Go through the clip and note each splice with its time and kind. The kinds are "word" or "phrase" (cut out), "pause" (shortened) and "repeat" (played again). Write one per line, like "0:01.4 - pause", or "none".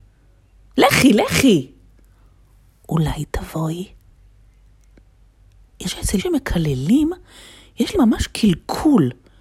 0:05.9 - word
0:06.2 - word
0:07.9 - word